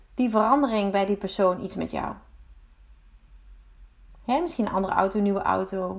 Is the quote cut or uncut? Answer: uncut